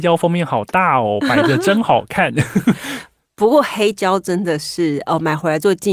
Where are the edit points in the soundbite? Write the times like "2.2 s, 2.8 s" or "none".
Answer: none